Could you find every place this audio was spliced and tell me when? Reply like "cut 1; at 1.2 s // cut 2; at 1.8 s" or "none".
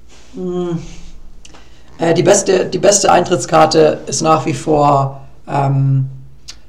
none